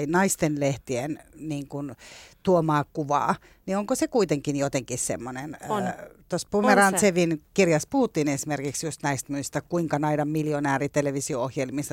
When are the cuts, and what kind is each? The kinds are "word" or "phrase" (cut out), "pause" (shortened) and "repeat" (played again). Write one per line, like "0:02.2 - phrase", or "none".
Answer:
none